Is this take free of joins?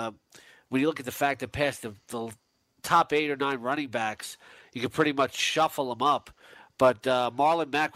yes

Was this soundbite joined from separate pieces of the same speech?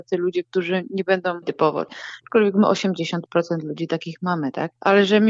yes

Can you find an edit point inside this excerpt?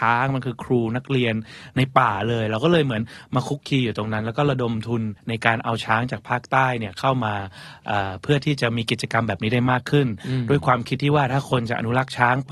yes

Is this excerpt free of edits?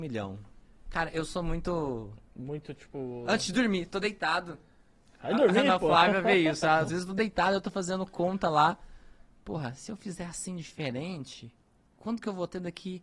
yes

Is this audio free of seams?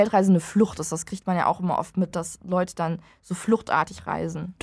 yes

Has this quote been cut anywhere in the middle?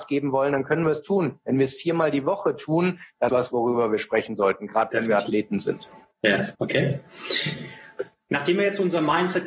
yes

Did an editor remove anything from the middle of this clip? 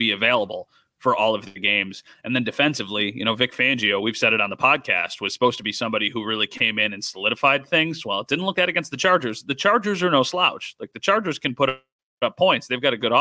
yes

